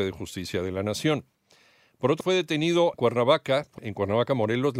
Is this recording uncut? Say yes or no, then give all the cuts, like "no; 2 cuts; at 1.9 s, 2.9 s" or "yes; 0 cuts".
no; 3 cuts; at 2.2 s, 2.9 s, 3.8 s